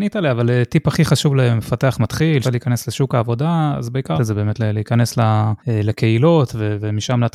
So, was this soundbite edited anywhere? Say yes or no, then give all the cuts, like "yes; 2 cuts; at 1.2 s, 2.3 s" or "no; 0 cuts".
yes; 3 cuts; at 2.4 s, 4.2 s, 5.6 s